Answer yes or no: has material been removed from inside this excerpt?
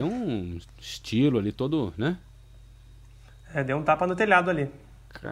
no